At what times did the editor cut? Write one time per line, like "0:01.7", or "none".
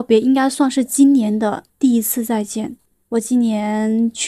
0:01.7
0:02.9